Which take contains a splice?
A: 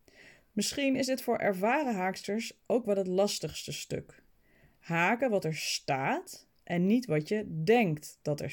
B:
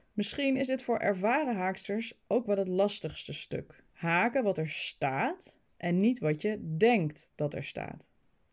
B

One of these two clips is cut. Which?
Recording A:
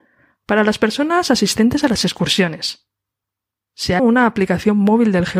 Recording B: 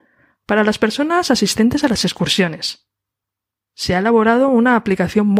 A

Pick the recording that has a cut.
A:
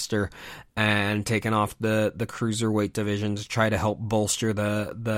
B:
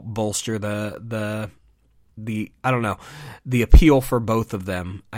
B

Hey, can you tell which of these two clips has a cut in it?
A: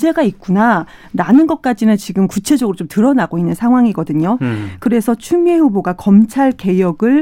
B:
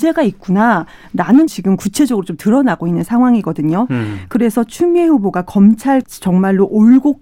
B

